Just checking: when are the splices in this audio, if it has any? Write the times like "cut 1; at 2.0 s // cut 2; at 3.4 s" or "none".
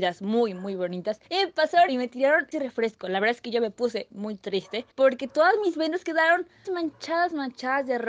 cut 1; at 1.2 s // cut 2; at 1.9 s // cut 3; at 2.5 s // cut 4; at 4.1 s // cut 5; at 4.9 s // cut 6; at 6.6 s

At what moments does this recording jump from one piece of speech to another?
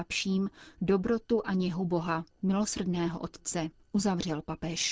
none

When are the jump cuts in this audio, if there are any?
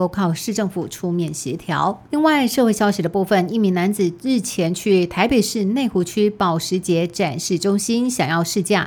cut 1; at 2.1 s

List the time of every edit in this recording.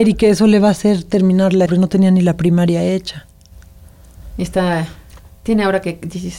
cut 1; at 1.7 s

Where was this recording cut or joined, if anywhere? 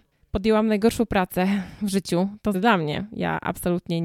cut 1; at 2.5 s

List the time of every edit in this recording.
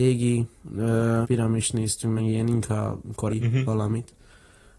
cut 1; at 1.2 s // cut 2; at 2.2 s // cut 3; at 3.3 s

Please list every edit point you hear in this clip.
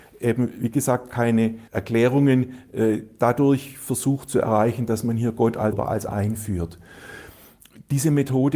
cut 1; at 1.7 s // cut 2; at 5.7 s // cut 3; at 6.1 s

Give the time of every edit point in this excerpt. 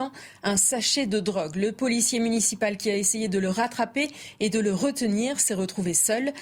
none

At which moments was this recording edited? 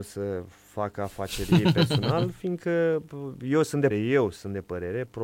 cut 1; at 3.9 s

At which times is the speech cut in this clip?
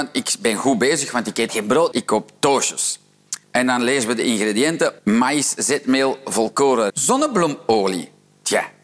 cut 1; at 1.5 s // cut 2; at 1.9 s // cut 3; at 3.4 s // cut 4; at 5.0 s // cut 5; at 6.9 s

